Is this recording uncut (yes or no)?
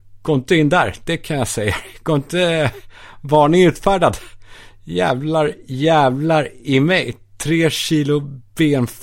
yes